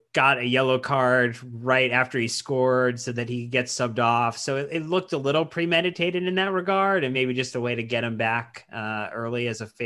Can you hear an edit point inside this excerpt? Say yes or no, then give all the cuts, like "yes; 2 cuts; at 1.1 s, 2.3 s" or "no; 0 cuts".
no; 0 cuts